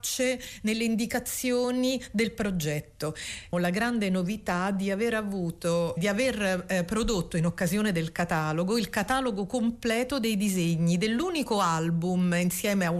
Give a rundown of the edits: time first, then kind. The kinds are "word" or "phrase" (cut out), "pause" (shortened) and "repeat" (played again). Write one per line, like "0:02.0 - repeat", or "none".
0:03.5 - phrase
0:06.0 - word